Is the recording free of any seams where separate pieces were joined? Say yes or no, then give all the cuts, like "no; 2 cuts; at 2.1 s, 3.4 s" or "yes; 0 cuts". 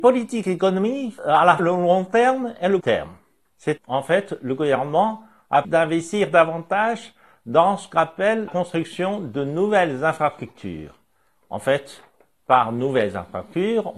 no; 6 cuts; at 1.2 s, 1.6 s, 2.8 s, 3.8 s, 5.6 s, 8.5 s